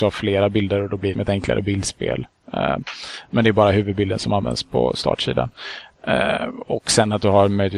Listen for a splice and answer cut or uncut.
cut